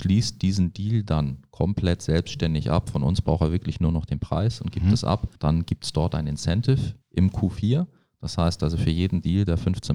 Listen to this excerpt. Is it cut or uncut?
cut